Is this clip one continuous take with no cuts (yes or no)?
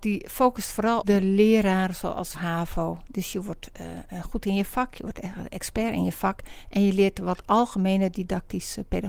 no